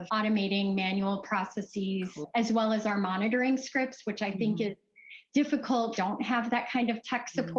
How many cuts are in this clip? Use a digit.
1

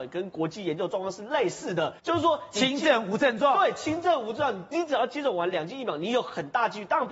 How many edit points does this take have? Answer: 1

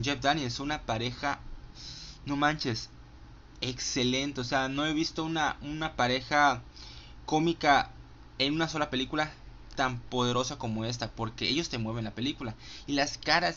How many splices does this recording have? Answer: 0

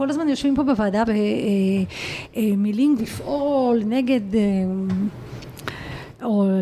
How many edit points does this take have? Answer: 2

